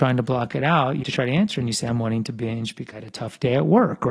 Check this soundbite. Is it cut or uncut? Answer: cut